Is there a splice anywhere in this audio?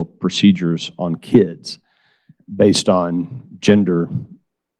no; 0 cuts

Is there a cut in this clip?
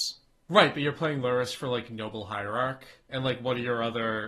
no; 0 cuts

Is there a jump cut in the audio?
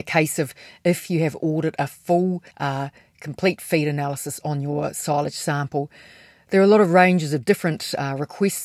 yes; 1 cut; at 2.5 s

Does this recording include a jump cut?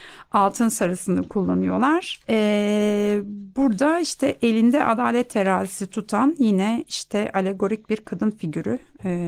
yes; 1 cut; at 2.2 s

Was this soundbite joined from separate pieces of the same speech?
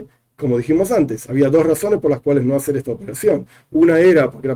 no; 0 cuts

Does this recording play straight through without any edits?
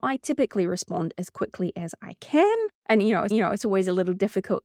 no; 2 cuts; at 2.7 s, 3.3 s

